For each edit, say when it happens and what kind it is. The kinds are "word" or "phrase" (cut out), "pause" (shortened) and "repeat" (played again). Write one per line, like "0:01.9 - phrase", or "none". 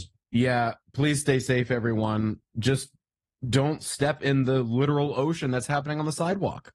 none